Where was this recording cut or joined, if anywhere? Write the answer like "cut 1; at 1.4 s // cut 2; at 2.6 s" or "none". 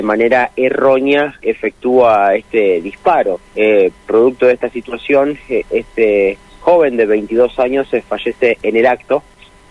cut 1; at 1.4 s // cut 2; at 3.5 s

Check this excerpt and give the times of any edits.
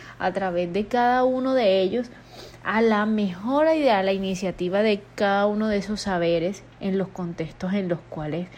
cut 1; at 6.7 s

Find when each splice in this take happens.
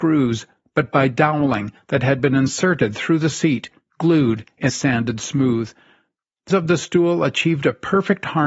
cut 1; at 4.7 s // cut 2; at 6.5 s

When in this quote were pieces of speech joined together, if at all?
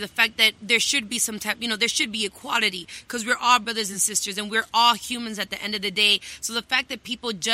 none

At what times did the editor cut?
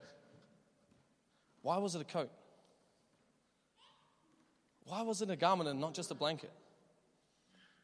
none

